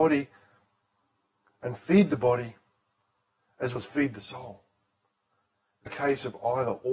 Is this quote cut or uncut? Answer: cut